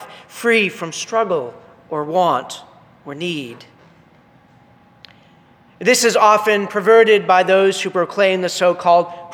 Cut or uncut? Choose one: uncut